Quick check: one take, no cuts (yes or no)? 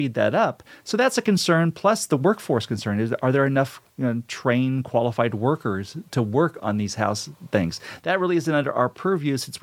no